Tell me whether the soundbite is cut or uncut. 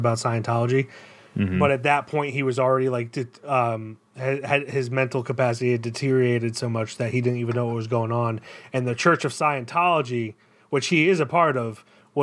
cut